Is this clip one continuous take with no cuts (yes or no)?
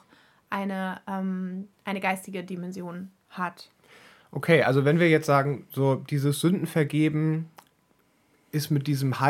yes